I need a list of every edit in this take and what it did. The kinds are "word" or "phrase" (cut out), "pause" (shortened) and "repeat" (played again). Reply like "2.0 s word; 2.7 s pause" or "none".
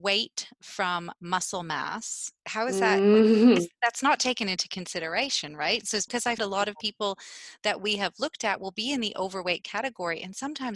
2.4 s pause; 6.1 s word; 6.4 s word